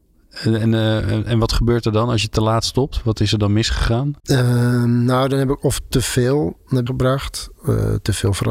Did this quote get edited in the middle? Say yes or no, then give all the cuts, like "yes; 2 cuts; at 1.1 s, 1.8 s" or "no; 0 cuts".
yes; 2 cuts; at 4.2 s, 6.9 s